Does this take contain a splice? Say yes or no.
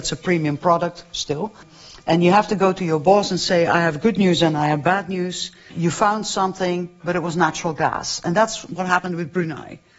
no